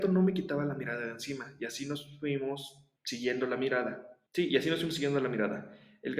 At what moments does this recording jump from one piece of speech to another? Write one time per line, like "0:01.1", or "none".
0:03.0
0:04.3